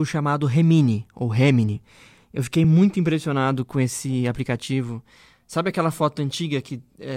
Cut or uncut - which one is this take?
uncut